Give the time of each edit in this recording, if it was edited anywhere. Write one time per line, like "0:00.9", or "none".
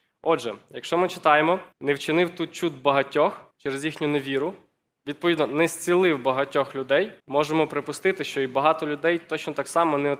0:01.7
0:03.5
0:07.2